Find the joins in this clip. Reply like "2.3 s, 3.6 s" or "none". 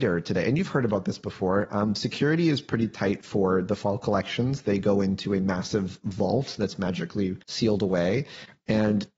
7.4 s